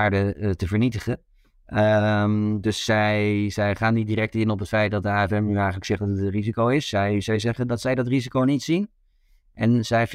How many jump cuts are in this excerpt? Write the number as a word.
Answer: zero